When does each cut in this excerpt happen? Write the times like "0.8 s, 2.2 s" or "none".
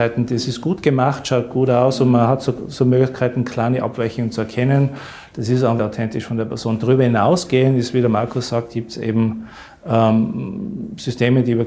5.8 s

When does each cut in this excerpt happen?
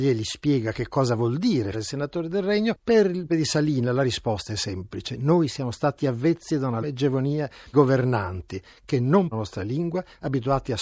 1.7 s, 3.3 s, 5.5 s, 6.8 s, 7.7 s, 9.3 s

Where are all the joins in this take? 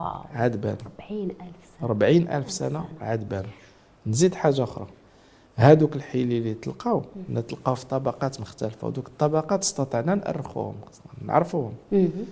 none

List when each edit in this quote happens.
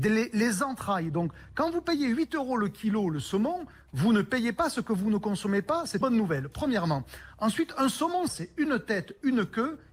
6.0 s, 8.3 s

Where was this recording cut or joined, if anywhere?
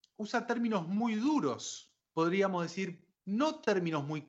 2.0 s, 3.1 s

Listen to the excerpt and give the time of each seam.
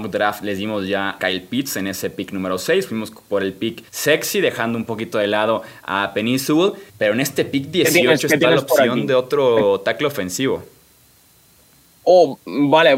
1.2 s, 3.9 s, 6.9 s

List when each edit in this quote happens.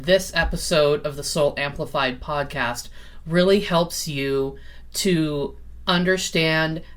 none

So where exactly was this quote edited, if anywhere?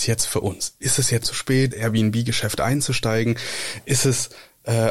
1.2 s, 1.7 s

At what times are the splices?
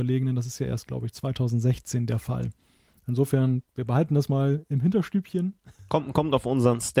none

